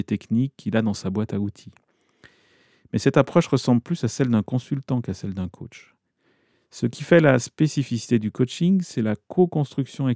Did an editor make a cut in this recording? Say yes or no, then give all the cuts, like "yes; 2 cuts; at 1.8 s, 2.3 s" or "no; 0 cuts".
no; 0 cuts